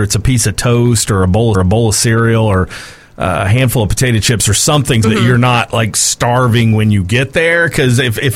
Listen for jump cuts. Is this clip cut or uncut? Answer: cut